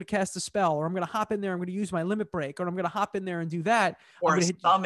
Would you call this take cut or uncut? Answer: uncut